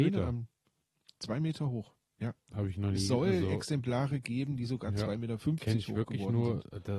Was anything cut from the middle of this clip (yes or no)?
no